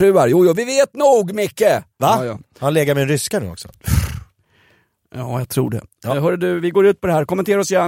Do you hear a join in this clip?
no; 0 cuts

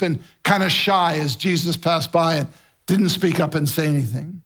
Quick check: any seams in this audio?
no; 0 cuts

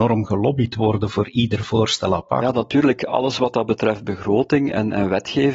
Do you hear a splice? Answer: no; 0 cuts

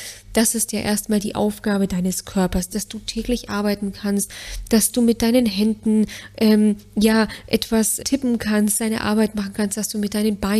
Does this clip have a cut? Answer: yes; 1 cut; at 8.0 s

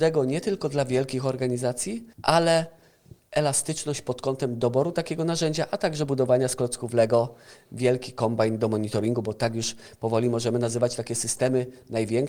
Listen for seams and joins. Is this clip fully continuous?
no; 1 cut; at 2.1 s

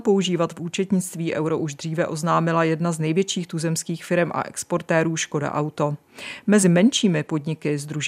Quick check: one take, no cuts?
yes; 0 cuts

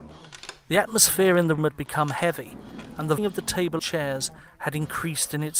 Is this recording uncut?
no; 3 cuts; at 1.6 s, 3.2 s, 3.8 s

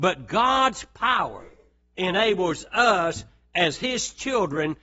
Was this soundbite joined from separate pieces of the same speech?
no; 0 cuts

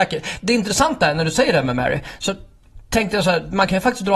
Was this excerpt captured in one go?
yes; 0 cuts

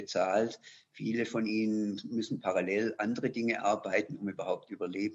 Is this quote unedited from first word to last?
yes; 0 cuts

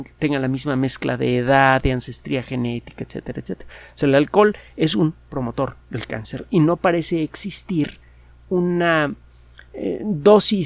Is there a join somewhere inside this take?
no; 0 cuts

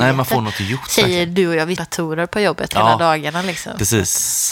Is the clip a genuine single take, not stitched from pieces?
no; 1 cut; at 1.8 s

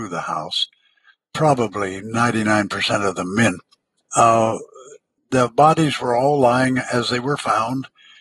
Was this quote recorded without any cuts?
yes; 0 cuts

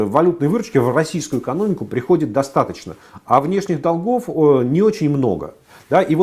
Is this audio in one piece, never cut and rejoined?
yes; 0 cuts

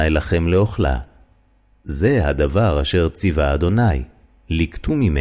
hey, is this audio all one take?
yes; 0 cuts

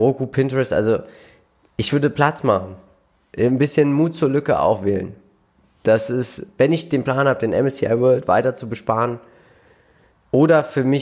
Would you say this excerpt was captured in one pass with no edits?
yes; 0 cuts

